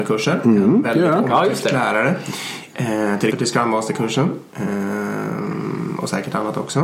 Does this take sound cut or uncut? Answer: cut